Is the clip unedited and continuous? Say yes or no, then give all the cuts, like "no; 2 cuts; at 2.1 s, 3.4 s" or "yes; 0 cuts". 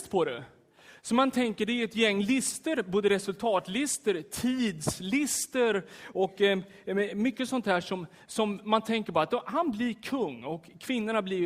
yes; 0 cuts